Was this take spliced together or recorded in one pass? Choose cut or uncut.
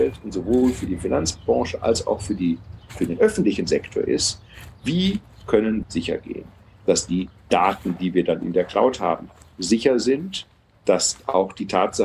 cut